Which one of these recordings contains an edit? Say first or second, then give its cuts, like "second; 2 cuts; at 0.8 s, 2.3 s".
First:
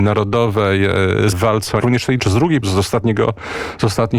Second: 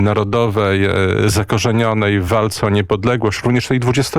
first; 4 cuts; at 1.3 s, 1.8 s, 2.2 s, 2.6 s